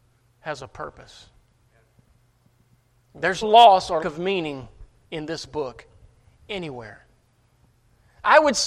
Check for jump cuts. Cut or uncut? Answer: cut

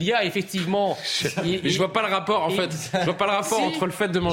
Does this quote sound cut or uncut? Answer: uncut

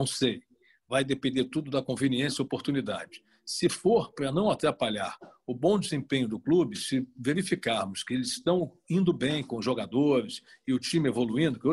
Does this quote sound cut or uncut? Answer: uncut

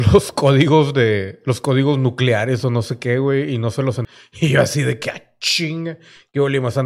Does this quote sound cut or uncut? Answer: uncut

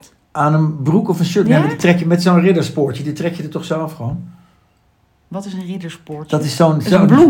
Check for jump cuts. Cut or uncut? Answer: uncut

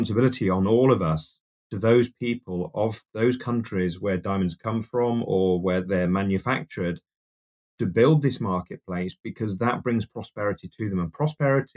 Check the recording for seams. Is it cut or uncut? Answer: uncut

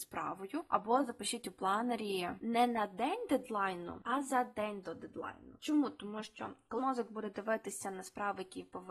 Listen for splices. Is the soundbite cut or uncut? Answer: cut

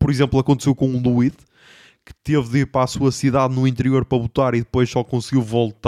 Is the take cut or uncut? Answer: uncut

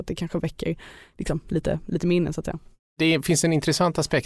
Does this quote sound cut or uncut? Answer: uncut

